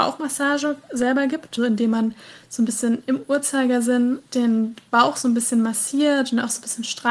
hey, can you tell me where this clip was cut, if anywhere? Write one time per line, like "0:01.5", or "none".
0:01.6
0:04.3